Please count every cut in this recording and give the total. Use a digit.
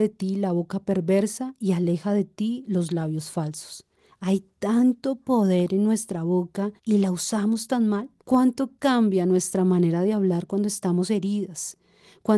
2